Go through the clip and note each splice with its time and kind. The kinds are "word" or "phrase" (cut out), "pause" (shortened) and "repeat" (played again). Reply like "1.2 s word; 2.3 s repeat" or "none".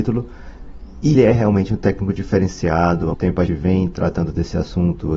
1.1 s word; 3.1 s word; 3.5 s word